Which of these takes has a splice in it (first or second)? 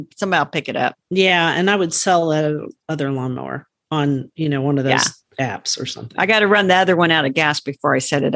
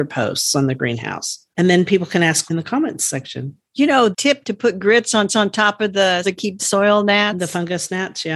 second